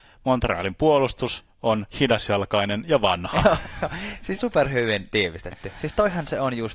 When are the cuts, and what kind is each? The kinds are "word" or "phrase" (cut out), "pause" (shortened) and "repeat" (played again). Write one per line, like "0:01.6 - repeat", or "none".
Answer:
0:01.9 - pause
0:04.4 - word